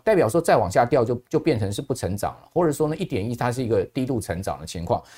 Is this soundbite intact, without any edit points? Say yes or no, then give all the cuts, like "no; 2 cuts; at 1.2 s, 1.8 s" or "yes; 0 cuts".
no; 1 cut; at 1.3 s